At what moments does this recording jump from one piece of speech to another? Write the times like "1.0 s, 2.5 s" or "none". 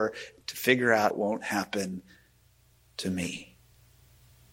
1.1 s